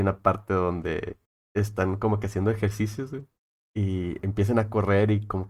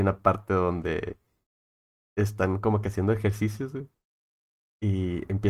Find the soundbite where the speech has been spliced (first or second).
first